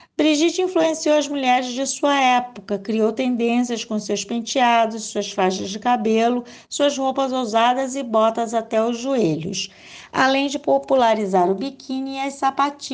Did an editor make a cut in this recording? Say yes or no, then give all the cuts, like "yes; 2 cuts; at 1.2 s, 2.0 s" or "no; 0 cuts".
no; 0 cuts